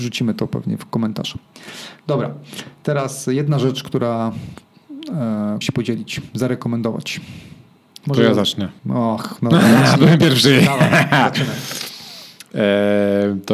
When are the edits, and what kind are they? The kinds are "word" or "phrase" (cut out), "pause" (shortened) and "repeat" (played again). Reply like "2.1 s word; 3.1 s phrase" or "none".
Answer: 5.6 s phrase; 8.8 s pause

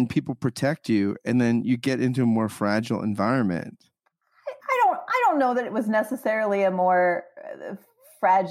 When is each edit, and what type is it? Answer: 4.6 s pause

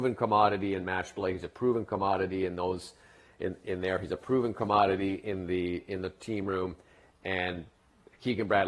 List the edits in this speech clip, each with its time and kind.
none

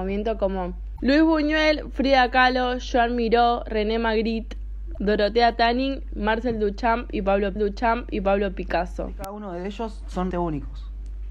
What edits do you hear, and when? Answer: 7.6 s repeat; 10.3 s word

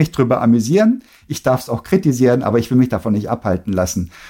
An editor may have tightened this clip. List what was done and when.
none

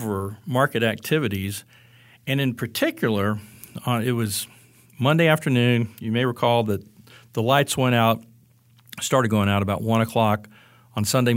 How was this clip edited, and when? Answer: none

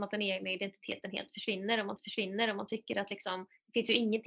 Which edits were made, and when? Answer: 2.0 s repeat

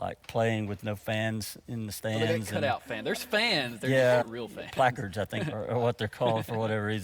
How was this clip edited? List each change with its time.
4.2 s word

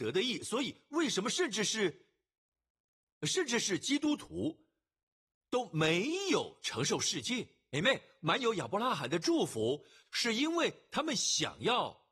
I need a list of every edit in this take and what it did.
none

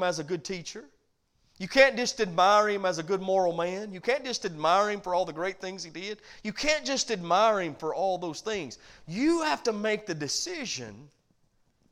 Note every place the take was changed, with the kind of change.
1.2 s pause

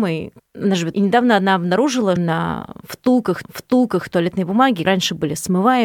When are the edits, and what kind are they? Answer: 0.9 s phrase; 2.2 s word; 3.4 s repeat; 4.8 s word

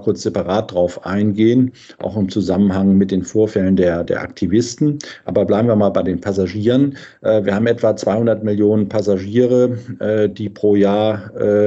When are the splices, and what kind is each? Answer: 4.0 s word

